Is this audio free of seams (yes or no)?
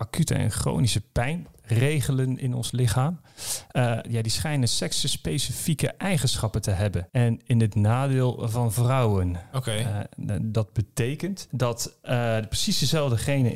yes